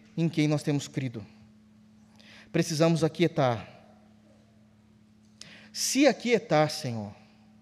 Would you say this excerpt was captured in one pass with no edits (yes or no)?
no